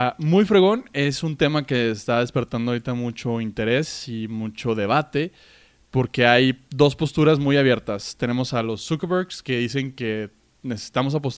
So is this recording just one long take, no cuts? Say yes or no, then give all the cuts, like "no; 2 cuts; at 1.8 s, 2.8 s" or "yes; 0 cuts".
yes; 0 cuts